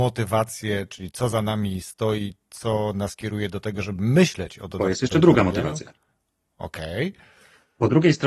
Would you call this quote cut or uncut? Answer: uncut